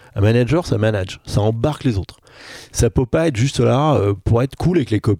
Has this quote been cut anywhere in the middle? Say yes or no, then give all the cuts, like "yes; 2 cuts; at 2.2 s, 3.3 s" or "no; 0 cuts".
no; 0 cuts